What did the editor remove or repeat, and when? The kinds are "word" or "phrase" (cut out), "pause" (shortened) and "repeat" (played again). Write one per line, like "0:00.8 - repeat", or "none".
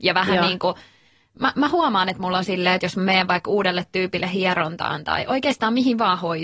none